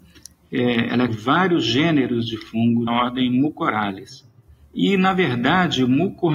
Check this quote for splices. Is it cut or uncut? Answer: cut